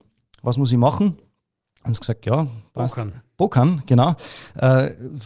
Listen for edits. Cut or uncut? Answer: uncut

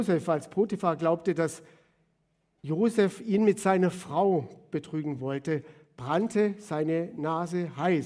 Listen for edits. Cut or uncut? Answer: uncut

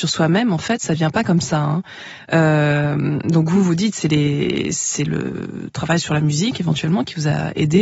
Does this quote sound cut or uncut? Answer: uncut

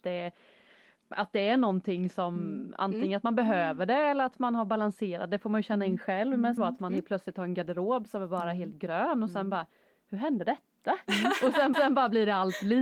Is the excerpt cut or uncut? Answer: cut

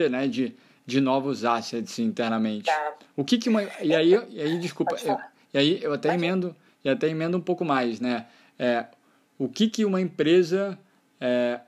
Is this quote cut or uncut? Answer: uncut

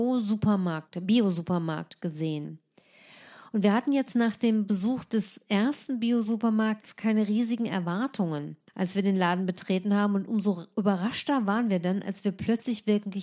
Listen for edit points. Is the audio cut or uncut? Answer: cut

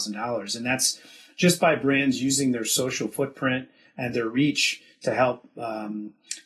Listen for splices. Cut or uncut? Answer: uncut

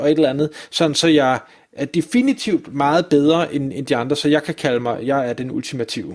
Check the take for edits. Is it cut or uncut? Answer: uncut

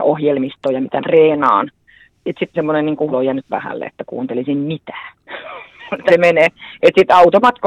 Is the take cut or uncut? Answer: cut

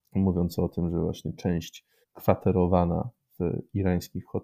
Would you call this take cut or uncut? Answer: cut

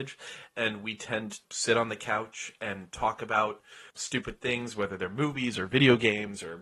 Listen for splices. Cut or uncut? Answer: cut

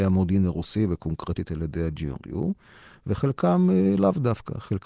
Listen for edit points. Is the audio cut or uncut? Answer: uncut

